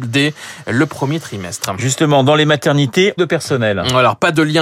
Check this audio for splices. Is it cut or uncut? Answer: cut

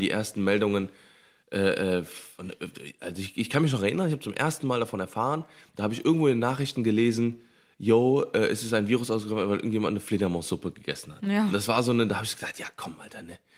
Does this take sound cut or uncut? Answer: uncut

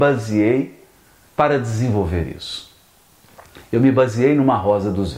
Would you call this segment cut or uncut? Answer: uncut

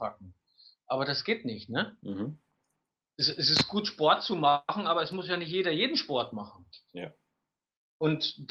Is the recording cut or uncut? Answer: uncut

